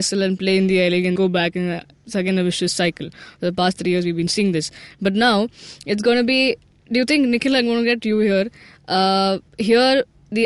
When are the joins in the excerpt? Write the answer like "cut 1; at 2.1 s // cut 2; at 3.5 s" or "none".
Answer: cut 1; at 1.2 s // cut 2; at 9.5 s